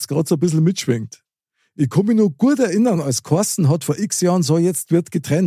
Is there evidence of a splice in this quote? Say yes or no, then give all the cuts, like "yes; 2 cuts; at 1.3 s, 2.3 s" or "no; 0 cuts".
no; 0 cuts